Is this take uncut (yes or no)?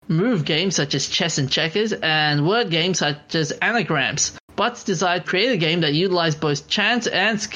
no